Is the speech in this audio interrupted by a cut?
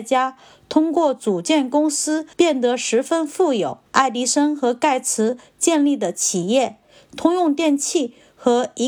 yes; 2 cuts; at 2.3 s, 3.9 s

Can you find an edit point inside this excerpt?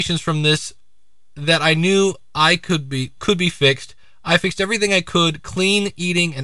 yes; 1 cut; at 3.2 s

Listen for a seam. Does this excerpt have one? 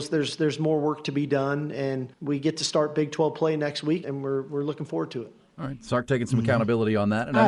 yes; 2 cuts; at 2.1 s, 4.0 s

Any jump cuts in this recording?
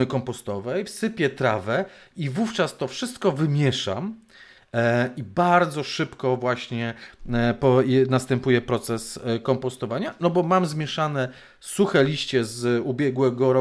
no; 0 cuts

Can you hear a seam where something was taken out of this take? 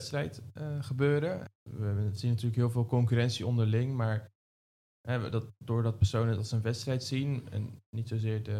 no; 0 cuts

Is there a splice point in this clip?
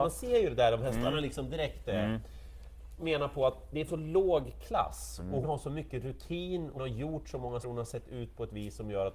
yes; 5 cuts; at 3.0 s, 3.9 s, 5.4 s, 6.8 s, 7.6 s

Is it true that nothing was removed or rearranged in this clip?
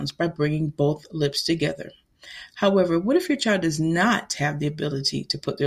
yes; 0 cuts

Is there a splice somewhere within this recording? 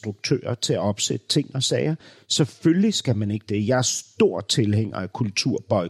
no; 0 cuts

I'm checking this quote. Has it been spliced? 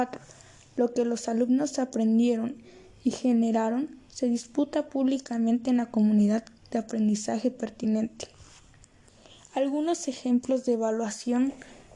no; 0 cuts

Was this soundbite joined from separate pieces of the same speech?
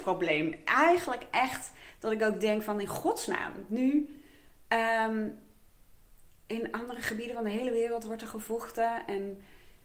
no; 0 cuts

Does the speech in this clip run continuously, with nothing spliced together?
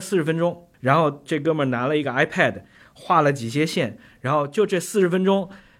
yes; 0 cuts

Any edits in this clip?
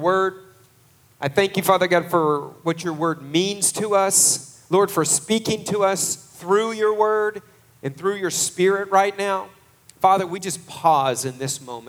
no; 0 cuts

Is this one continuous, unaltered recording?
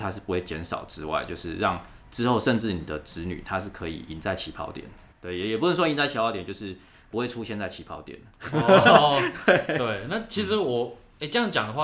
yes; 0 cuts

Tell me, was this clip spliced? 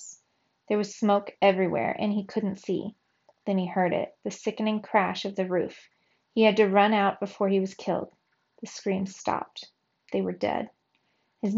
no; 0 cuts

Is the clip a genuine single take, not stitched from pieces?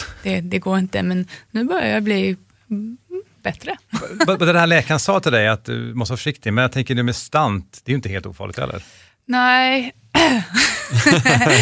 yes; 0 cuts

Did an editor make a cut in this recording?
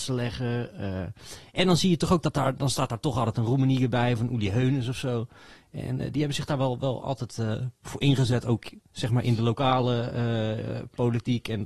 no; 0 cuts

